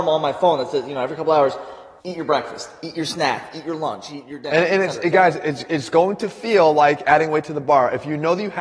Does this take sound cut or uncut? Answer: cut